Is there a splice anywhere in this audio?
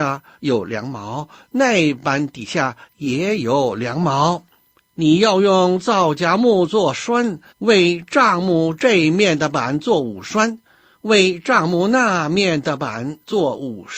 yes; 1 cut; at 7.5 s

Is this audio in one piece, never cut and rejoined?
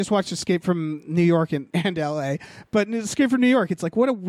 no; 1 cut; at 1.7 s

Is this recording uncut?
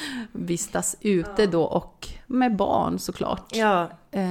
yes; 0 cuts

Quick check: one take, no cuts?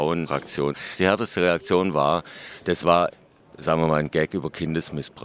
yes; 0 cuts

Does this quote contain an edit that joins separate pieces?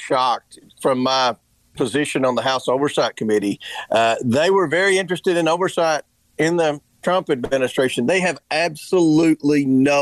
no; 0 cuts

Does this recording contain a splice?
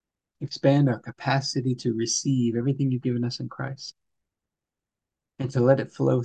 no; 0 cuts

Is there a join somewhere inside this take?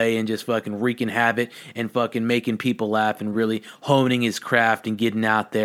no; 0 cuts

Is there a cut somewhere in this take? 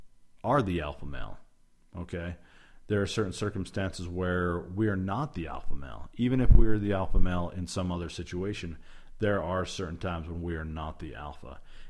no; 0 cuts

